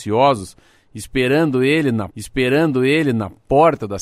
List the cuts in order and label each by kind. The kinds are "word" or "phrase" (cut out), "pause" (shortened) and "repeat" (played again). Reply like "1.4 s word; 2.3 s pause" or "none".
2.1 s repeat